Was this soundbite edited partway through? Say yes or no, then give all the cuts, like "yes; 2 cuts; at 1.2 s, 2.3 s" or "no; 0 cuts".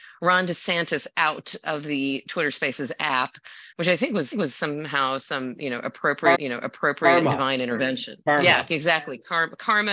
yes; 3 cuts; at 3.7 s, 4.3 s, 6.3 s